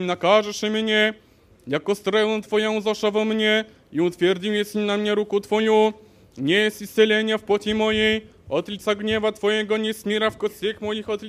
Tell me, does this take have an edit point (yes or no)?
no